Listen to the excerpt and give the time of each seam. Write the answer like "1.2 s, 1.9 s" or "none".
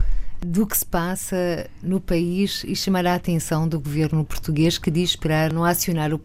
none

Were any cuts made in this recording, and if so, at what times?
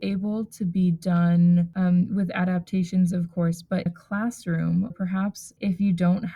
3.9 s, 4.9 s

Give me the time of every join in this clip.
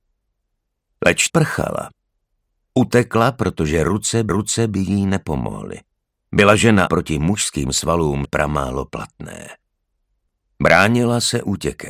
1.3 s, 4.3 s, 6.9 s, 8.2 s

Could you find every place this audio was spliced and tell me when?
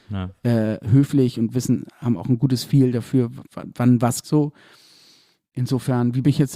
3.5 s, 4.2 s

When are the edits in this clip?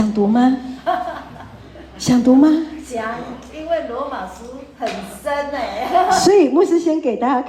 none

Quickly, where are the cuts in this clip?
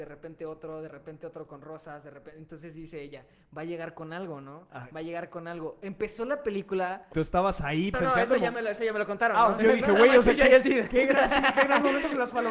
7.1 s, 7.9 s, 9.6 s

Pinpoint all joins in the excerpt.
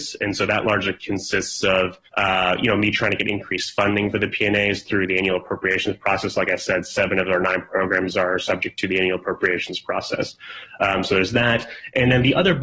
2.1 s

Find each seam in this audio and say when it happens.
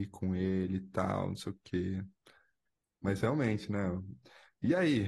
none

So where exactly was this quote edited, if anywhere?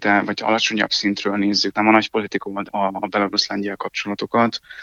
1.7 s, 2.7 s

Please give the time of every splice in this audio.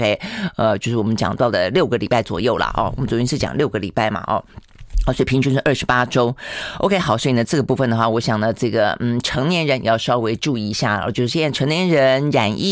none

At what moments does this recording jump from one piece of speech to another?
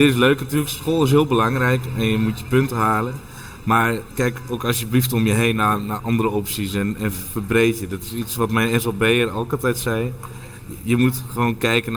4.1 s

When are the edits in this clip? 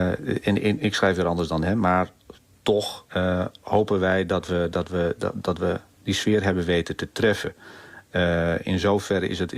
3.1 s

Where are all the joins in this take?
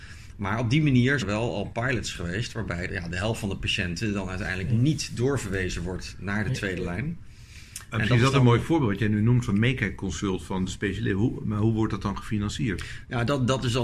1.2 s, 2.9 s

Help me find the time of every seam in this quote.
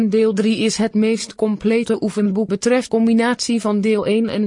2.5 s, 2.9 s

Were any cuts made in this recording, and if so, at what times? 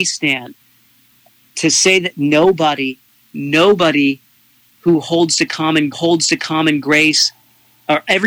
3.3 s, 5.9 s

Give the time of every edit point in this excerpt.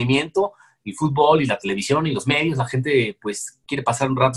none

